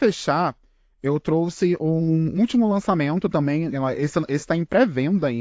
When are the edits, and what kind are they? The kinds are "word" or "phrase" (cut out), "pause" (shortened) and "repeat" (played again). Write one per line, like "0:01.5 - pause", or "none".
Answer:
none